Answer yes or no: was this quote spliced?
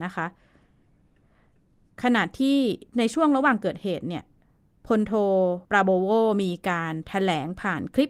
yes